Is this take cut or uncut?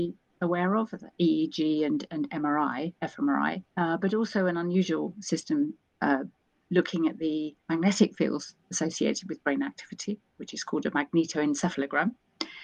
cut